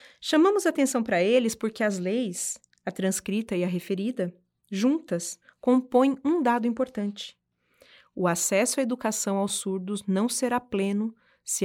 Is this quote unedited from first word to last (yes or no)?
yes